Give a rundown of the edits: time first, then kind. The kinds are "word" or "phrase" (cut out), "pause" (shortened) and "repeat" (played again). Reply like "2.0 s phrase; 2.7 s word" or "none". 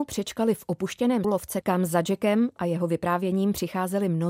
1.2 s word; 1.6 s word